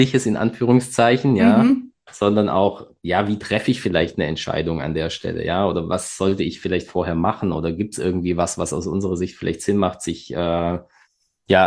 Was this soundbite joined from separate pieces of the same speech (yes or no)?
no